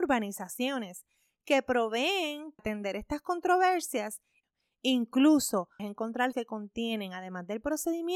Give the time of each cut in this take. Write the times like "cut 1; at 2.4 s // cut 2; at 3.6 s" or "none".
cut 1; at 2.6 s // cut 2; at 5.8 s // cut 3; at 6.3 s